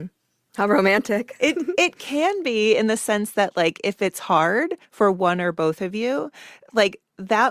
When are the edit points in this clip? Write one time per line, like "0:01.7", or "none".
0:04.8